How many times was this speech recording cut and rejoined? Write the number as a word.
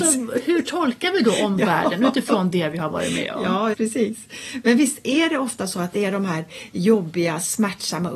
one